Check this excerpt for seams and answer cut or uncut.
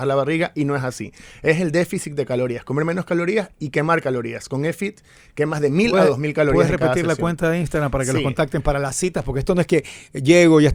uncut